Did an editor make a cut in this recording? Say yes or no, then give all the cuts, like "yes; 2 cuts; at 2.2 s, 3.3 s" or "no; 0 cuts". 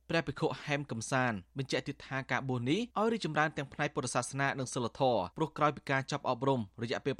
yes; 2 cuts; at 2.9 s, 5.3 s